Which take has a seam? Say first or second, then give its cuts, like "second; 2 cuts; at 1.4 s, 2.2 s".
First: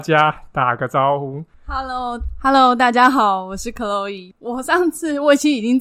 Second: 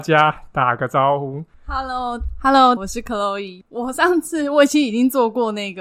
second; 1 cut; at 2.8 s